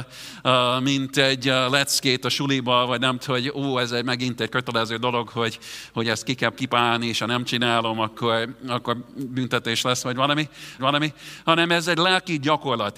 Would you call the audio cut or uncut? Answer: cut